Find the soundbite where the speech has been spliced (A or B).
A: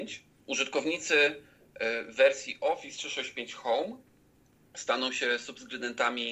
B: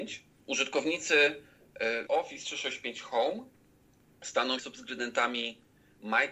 B